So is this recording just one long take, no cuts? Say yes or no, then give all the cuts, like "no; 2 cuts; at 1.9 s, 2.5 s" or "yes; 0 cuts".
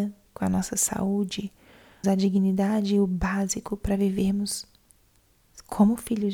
no; 1 cut; at 2.0 s